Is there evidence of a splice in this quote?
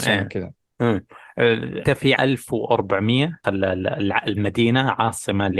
yes; 3 cuts; at 1.8 s, 2.2 s, 3.4 s

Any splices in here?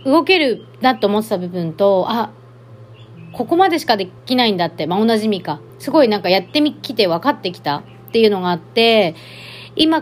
yes; 2 cuts; at 4.2 s, 5.7 s

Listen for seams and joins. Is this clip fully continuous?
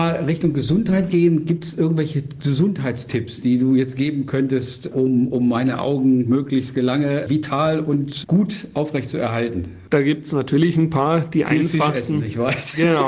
yes; 0 cuts

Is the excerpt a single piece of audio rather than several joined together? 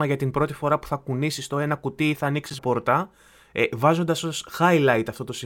no; 1 cut; at 2.6 s

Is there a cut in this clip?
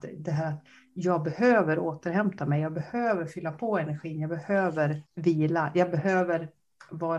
yes; 1 cut; at 5.1 s

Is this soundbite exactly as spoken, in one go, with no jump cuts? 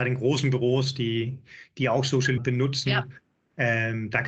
no; 1 cut; at 2.4 s

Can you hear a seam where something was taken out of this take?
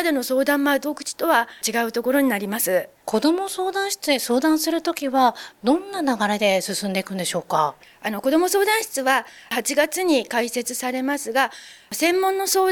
yes; 1 cut; at 3.0 s

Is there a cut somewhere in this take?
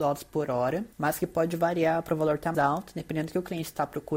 yes; 2 cuts; at 0.9 s, 2.5 s

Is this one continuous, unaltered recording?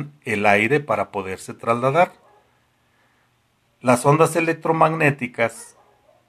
yes; 0 cuts

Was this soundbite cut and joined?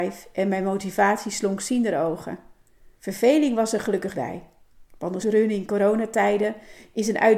yes; 4 cuts; at 3.0 s, 4.1 s, 4.9 s, 5.2 s

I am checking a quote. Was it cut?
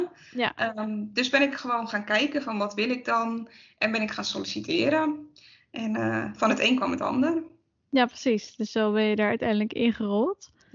no; 0 cuts

